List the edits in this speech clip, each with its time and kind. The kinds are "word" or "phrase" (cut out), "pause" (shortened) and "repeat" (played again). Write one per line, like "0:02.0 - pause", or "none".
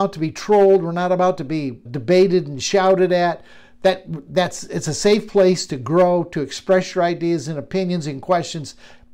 0:01.9 - word